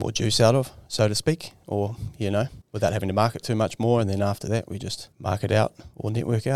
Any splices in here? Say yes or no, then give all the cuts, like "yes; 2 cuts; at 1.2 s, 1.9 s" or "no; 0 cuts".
yes; 2 cuts; at 2.6 s, 5.1 s